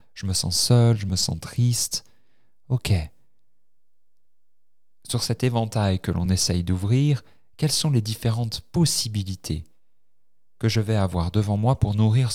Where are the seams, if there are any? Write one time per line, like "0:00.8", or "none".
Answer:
none